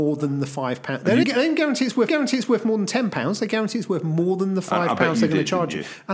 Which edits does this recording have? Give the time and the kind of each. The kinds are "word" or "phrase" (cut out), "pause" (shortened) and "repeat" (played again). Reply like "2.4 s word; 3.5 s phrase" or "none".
1.2 s word; 2.1 s repeat